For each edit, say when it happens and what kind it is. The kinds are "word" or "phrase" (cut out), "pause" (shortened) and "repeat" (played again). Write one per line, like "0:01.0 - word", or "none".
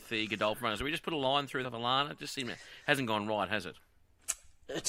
0:01.6 - phrase